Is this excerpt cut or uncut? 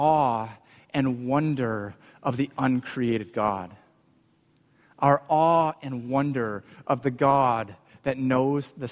uncut